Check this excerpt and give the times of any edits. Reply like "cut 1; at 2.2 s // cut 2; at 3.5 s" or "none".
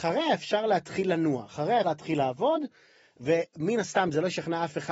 cut 1; at 1.8 s